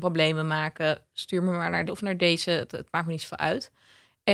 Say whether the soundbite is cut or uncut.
cut